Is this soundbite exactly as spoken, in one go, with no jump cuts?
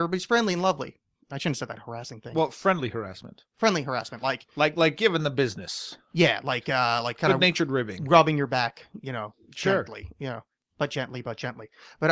yes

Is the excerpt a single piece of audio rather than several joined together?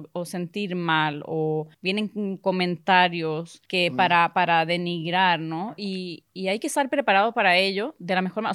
no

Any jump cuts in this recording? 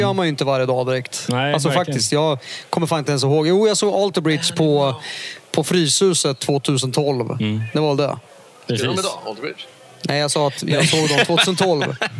no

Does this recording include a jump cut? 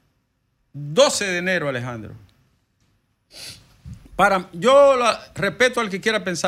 yes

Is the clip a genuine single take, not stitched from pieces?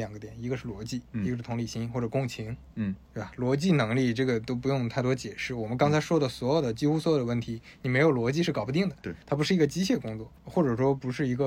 no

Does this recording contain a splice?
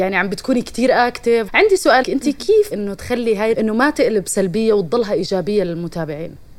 yes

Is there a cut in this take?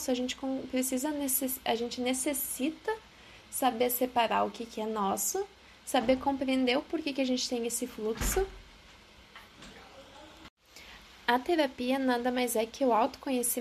no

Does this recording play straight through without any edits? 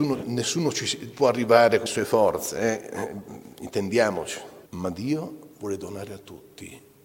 no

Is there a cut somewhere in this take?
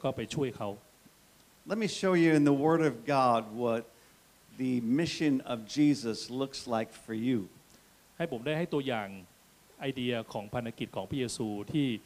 no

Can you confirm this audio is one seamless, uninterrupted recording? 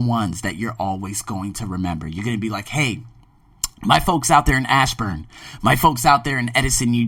yes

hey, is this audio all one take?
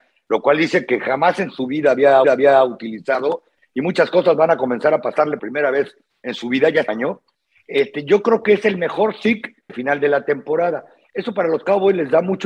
no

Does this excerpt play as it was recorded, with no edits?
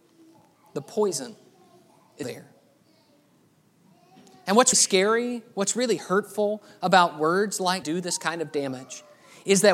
no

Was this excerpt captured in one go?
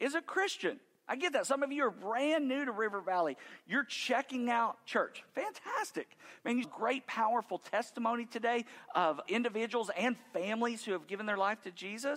no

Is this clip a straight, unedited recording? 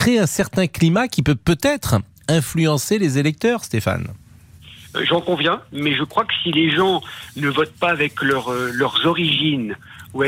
yes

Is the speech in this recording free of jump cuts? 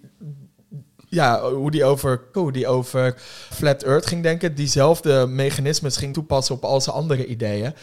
no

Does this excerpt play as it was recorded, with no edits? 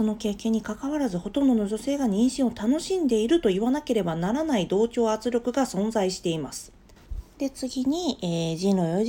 no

